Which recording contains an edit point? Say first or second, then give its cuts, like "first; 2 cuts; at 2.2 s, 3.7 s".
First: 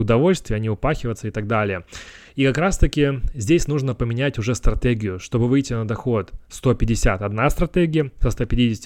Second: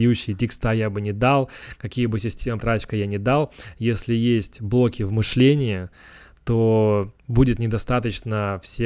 second; 2 cuts; at 2.6 s, 7.2 s